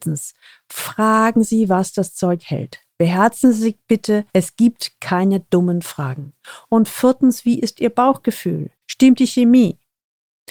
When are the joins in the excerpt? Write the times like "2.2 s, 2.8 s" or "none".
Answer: 4.3 s, 8.8 s